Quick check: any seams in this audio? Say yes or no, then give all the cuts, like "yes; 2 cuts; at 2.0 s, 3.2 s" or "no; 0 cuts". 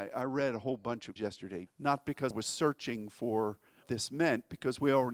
yes; 4 cuts; at 1.2 s, 1.7 s, 2.3 s, 3.8 s